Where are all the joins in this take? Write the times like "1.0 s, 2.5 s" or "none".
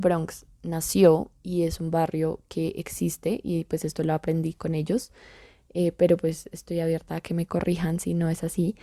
none

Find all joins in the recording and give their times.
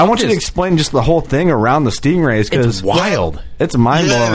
none

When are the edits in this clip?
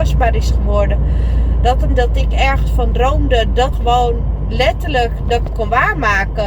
1.9 s, 3.7 s, 5.5 s

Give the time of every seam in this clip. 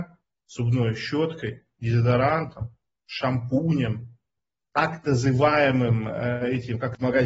none

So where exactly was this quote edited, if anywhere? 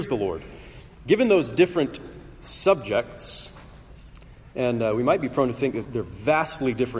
5.8 s

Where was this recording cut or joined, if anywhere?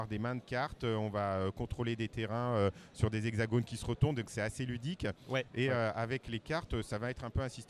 none

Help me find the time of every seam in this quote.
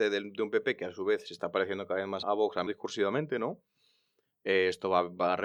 2.2 s, 2.7 s

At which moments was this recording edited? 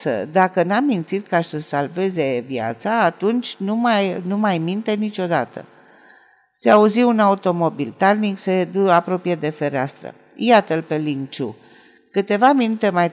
none

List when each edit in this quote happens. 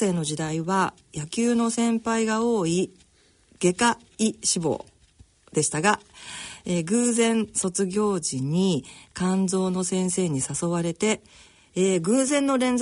none

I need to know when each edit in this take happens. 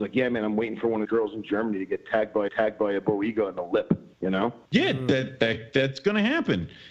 1.0 s, 2.5 s, 4.1 s, 4.7 s

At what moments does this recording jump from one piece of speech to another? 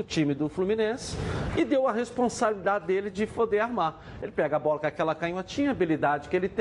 none

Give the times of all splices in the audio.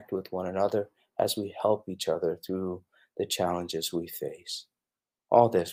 none

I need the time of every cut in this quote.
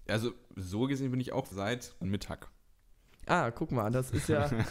1.5 s, 2.0 s

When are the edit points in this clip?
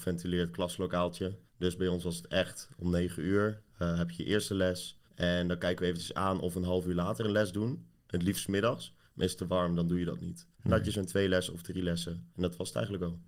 1.5 s, 3.7 s, 5.1 s, 10.5 s, 12.3 s

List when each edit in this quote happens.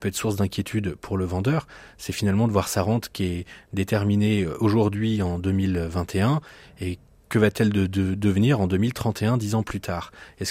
none

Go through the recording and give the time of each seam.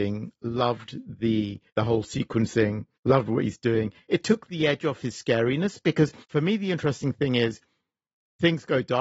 1.7 s, 2.9 s, 6.2 s

